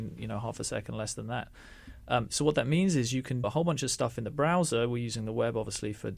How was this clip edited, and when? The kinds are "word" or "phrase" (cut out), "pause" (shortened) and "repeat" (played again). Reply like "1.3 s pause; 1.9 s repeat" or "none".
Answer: 3.4 s word